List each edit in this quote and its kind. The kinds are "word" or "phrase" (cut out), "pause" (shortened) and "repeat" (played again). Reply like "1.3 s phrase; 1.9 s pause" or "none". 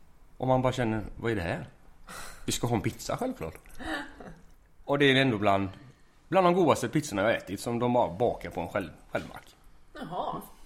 none